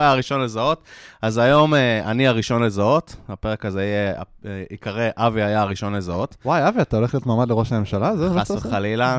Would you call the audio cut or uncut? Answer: uncut